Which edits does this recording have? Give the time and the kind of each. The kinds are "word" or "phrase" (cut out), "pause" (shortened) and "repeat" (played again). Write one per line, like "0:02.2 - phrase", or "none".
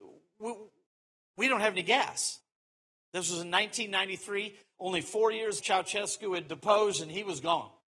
0:05.6 - word
0:06.5 - word